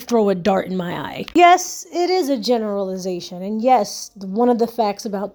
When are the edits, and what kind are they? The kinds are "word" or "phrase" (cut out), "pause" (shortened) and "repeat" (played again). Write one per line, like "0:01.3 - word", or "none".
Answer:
none